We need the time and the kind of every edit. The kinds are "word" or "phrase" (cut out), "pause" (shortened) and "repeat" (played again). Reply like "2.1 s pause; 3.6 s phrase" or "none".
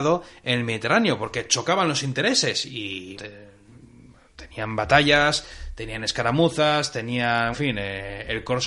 3.2 s word; 7.5 s word